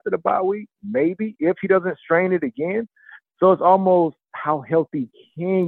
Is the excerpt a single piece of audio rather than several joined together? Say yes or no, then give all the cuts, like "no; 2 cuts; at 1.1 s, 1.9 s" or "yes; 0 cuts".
yes; 0 cuts